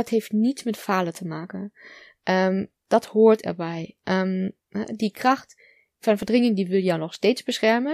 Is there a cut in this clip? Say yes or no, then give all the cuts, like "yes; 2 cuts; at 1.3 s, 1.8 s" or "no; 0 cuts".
no; 0 cuts